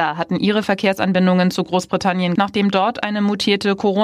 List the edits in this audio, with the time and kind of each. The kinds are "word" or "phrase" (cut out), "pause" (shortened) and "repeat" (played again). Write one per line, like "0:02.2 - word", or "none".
0:02.4 - word

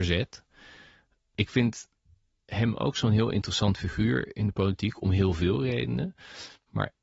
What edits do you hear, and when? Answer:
none

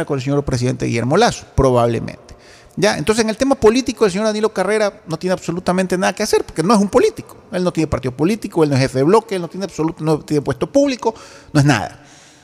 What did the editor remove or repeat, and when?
0:01.5 - pause
0:05.0 - pause

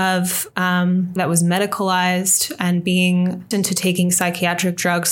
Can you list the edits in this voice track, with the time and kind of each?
0:01.2 - phrase
0:03.5 - word

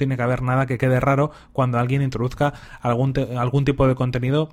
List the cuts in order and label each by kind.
none

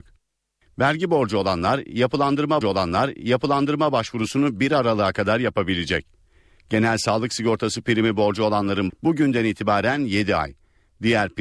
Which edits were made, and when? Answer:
0:02.6 - repeat
0:08.9 - phrase

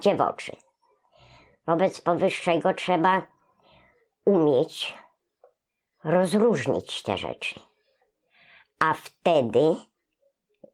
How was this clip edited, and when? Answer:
none

